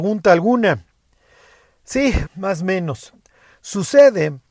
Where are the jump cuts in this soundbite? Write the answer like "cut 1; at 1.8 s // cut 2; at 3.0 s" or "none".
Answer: cut 1; at 2.3 s